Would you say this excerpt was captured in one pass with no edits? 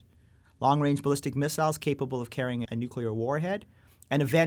no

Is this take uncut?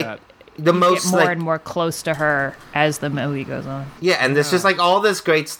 no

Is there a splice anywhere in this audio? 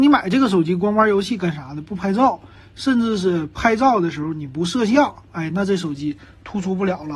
no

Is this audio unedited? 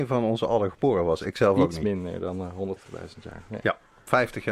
no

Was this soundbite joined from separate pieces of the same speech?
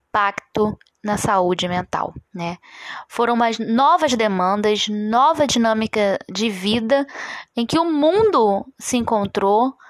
yes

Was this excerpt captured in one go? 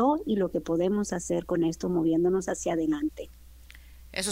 yes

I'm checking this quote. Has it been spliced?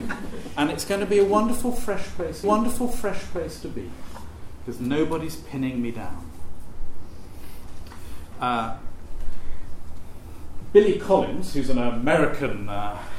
yes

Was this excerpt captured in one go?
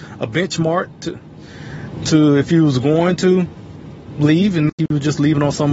yes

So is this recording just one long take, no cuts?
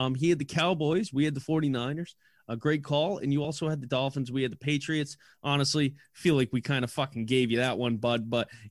yes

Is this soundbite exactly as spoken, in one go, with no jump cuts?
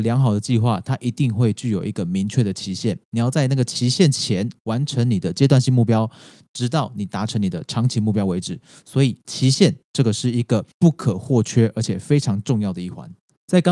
no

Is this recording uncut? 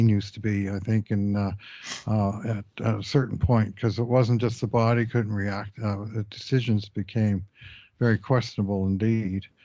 yes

